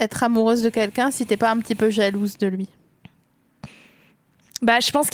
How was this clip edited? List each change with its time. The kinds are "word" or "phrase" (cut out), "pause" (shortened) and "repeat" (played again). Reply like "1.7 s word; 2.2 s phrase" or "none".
none

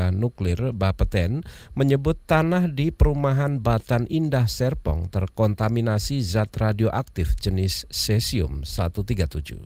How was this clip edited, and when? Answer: none

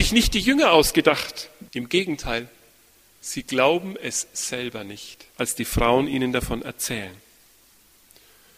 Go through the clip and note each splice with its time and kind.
1.7 s pause; 5.3 s pause

